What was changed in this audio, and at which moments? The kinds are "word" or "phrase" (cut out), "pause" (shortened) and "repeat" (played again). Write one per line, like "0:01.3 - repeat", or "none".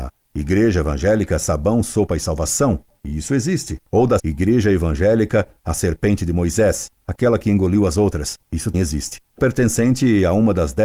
0:04.2 - word
0:08.7 - word
0:09.4 - word